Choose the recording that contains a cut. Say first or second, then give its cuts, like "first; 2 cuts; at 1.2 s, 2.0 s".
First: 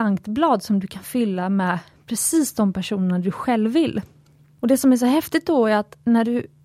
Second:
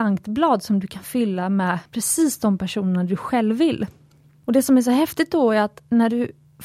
second; 1 cut; at 1.9 s